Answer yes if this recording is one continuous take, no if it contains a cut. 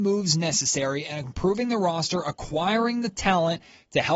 yes